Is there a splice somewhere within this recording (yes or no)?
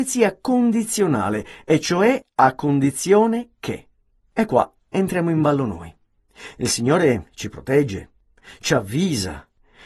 no